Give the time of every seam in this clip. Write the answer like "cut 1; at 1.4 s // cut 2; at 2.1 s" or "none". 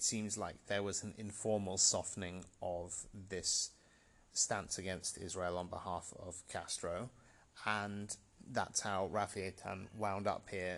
none